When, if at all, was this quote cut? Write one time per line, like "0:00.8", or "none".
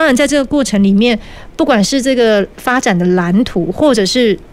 0:02.5

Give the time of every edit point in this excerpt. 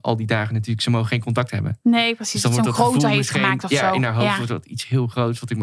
none

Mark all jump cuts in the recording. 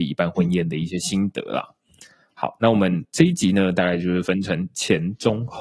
none

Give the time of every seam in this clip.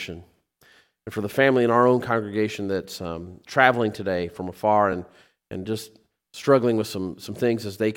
none

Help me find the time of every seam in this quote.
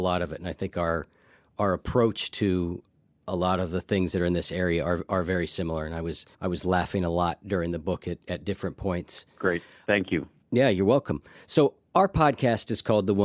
0:06.3

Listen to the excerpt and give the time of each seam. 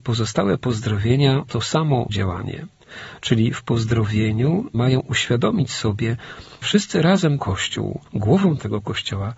0:01.4
0:02.1
0:04.7
0:06.6
0:07.4
0:08.1

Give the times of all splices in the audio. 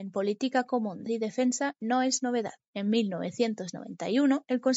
0:01.1

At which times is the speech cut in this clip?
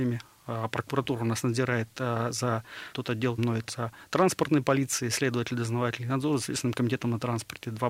0:02.9
0:03.4
0:03.7

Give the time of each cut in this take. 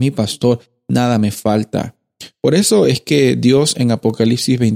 none

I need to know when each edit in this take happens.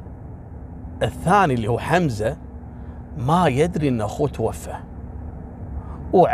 none

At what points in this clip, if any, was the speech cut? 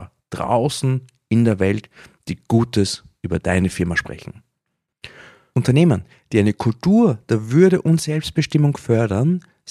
none

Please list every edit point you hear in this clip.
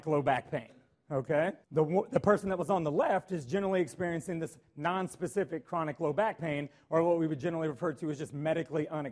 0:01.6

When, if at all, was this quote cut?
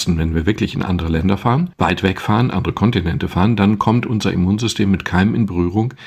none

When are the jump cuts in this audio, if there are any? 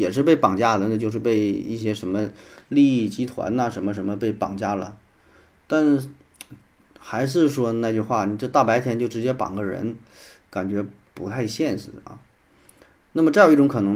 none

